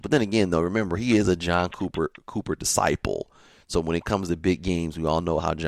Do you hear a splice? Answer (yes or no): no